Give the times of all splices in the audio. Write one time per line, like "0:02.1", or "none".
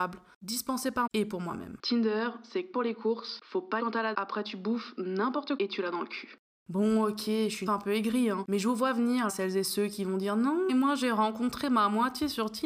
0:01.1
0:02.7
0:03.8
0:04.1
0:05.6
0:07.7
0:09.3
0:10.7